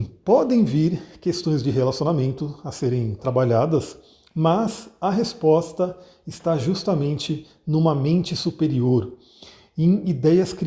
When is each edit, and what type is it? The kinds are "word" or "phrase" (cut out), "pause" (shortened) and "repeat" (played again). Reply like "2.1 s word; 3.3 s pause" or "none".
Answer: none